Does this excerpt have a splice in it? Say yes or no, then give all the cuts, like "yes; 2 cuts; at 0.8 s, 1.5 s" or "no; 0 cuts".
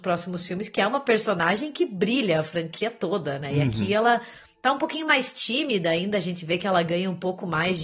no; 0 cuts